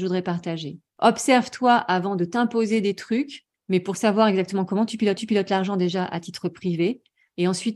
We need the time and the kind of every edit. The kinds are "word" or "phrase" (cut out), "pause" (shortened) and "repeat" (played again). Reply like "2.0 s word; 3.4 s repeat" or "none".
3.5 s pause; 5.2 s repeat